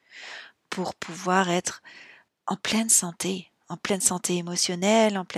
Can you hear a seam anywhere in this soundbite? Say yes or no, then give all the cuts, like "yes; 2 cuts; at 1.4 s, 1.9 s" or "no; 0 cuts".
yes; 1 cut; at 2.3 s